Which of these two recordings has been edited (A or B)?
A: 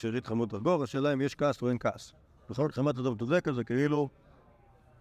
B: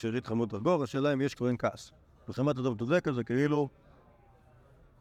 B